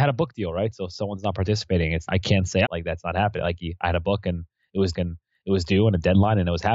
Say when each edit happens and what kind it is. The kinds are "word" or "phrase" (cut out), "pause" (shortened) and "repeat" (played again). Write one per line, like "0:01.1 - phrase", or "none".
0:02.1 - word
0:02.6 - phrase
0:04.9 - repeat